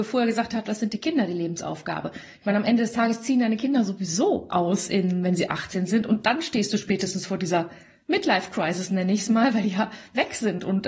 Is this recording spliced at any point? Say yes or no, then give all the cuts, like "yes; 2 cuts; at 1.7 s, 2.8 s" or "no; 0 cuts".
no; 0 cuts